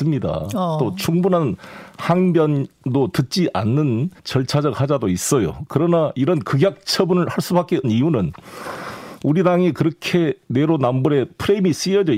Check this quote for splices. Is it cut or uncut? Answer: cut